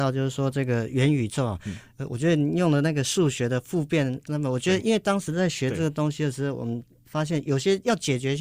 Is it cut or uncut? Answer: cut